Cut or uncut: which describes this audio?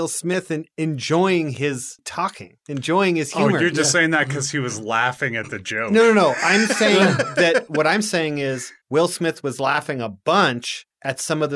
uncut